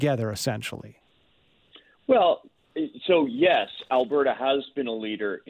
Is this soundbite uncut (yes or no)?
yes